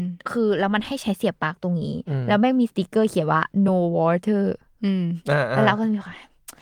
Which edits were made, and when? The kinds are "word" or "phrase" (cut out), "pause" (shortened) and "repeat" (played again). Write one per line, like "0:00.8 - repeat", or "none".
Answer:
none